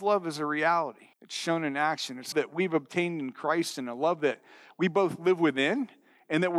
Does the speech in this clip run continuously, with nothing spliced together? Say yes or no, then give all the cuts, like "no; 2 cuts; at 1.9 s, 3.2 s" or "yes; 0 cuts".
no; 2 cuts; at 1.1 s, 2.3 s